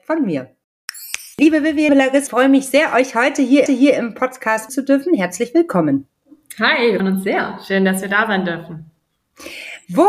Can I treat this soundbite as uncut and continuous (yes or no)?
no